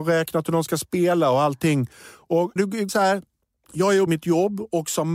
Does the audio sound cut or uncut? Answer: cut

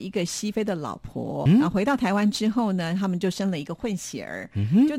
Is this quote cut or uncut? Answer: cut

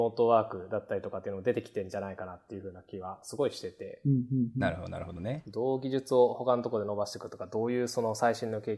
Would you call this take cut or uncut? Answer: uncut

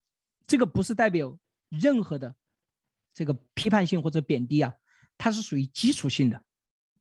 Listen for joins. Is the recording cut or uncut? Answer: uncut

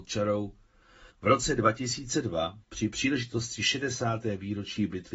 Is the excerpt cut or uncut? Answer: cut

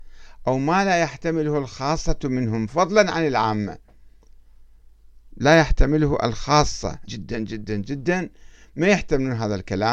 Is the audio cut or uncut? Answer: cut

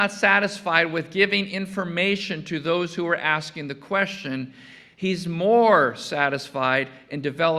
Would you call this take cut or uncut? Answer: uncut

